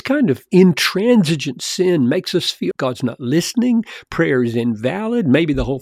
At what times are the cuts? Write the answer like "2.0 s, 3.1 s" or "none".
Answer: 2.7 s